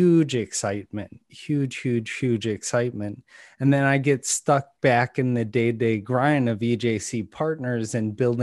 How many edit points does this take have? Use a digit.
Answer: 0